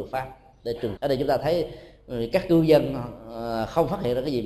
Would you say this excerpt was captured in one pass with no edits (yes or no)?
no